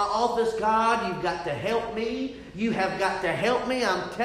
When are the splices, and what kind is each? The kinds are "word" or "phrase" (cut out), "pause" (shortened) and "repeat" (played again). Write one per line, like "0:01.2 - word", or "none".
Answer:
none